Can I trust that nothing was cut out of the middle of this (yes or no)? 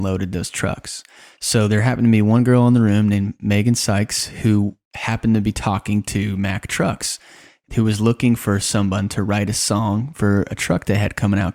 yes